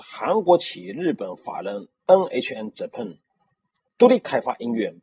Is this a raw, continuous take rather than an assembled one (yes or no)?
yes